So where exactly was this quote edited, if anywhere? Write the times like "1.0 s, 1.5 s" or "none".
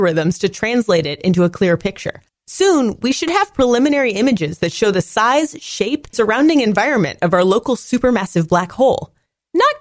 2.3 s, 6.1 s